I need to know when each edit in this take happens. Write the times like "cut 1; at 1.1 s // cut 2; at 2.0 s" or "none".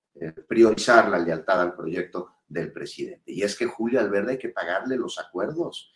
none